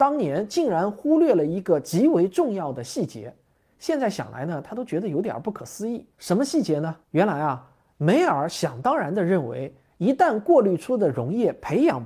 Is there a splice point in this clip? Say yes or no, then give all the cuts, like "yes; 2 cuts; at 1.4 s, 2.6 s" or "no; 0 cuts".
yes; 2 cuts; at 6.1 s, 7.0 s